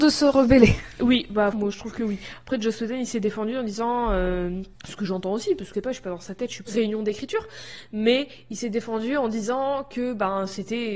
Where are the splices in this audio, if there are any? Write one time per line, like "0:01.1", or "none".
0:01.5
0:04.8
0:05.7
0:06.7